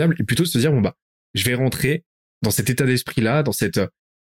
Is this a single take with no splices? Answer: yes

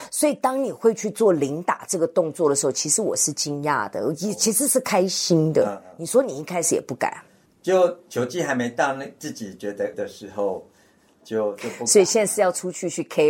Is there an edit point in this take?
yes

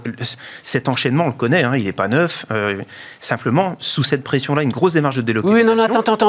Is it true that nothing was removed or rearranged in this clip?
yes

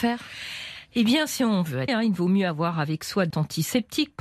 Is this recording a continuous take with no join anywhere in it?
no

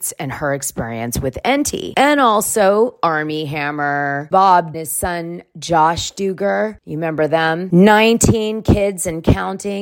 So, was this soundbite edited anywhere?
yes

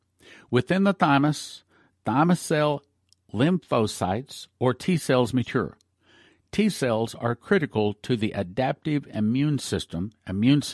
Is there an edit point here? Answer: no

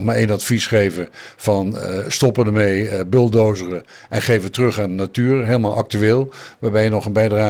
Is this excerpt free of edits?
yes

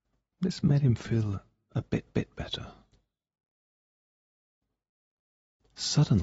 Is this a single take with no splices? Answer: no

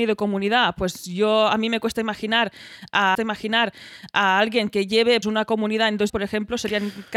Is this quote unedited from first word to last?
no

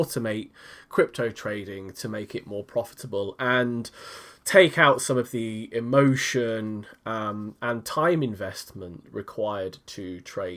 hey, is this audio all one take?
yes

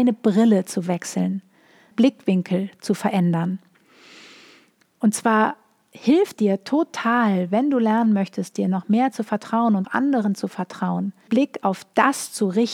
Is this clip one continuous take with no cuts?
no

